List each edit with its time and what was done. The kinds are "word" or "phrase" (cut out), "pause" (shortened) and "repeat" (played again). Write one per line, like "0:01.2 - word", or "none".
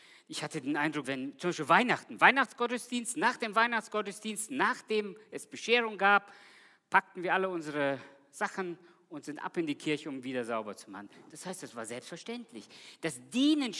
0:01.0 - word